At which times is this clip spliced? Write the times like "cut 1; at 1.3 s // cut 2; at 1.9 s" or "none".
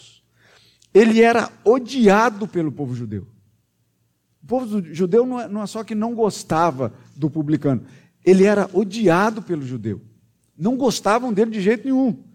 none